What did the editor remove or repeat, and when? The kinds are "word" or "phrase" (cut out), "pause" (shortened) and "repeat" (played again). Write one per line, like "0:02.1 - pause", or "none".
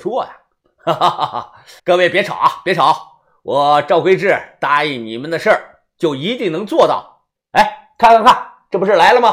0:01.8 - pause